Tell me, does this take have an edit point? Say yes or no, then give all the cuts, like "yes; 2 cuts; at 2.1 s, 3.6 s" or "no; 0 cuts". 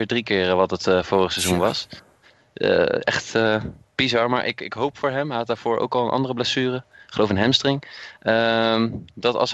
no; 0 cuts